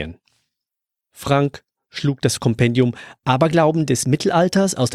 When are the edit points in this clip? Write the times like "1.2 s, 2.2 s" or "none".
none